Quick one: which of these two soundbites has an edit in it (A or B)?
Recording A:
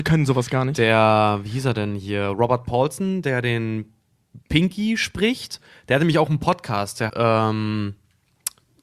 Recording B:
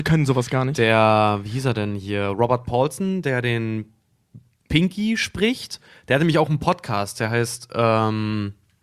A